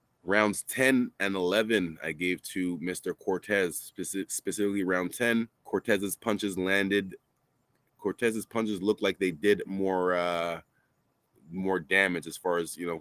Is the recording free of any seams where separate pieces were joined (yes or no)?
no